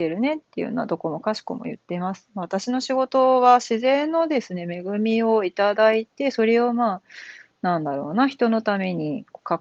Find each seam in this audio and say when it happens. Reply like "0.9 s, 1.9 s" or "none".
none